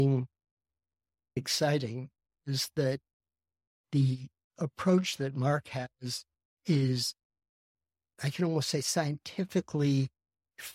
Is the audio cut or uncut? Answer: cut